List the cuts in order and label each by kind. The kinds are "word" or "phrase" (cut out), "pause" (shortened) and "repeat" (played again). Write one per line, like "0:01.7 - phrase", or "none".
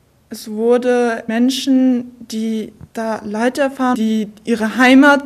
0:01.3 - phrase
0:02.9 - pause
0:03.9 - word